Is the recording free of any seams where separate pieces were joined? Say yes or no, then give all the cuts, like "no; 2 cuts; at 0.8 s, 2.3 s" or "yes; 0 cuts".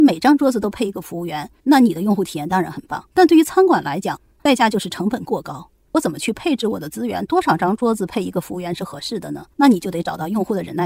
no; 3 cuts; at 1.6 s, 3.1 s, 9.5 s